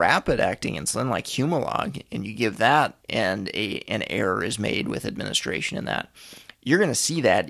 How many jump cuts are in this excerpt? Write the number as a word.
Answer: one